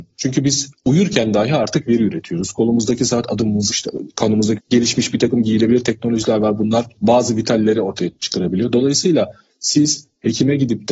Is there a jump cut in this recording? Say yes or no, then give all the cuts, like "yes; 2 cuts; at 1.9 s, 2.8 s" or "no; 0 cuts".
yes; 2 cuts; at 3.7 s, 4.6 s